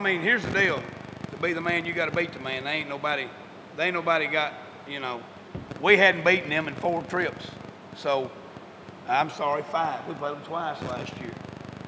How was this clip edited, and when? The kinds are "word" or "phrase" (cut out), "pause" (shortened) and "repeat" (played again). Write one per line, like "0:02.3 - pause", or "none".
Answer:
none